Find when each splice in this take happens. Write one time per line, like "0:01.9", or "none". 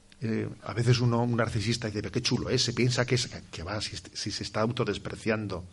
none